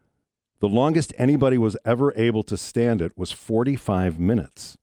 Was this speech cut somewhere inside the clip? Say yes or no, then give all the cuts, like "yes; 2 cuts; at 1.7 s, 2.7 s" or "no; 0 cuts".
no; 0 cuts